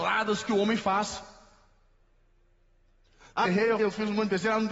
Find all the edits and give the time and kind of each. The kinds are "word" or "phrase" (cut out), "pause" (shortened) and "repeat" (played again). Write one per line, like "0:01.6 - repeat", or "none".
0:03.5 - word
0:03.8 - word

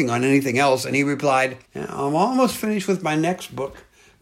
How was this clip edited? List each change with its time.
0:01.6 - pause

